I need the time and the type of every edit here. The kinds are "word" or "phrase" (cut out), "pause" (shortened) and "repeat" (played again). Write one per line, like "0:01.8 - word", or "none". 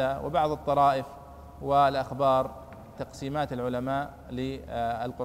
0:03.0 - word